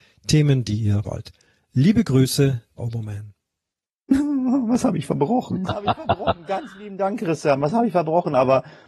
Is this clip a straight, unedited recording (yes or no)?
no